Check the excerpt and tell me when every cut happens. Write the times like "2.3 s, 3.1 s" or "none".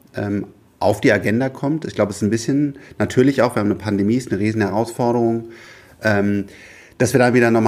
none